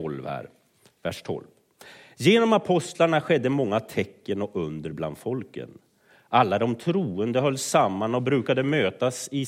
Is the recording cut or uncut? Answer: uncut